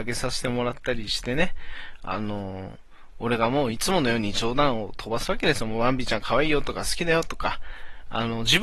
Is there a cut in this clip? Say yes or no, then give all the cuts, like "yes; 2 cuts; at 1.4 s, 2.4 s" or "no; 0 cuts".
no; 0 cuts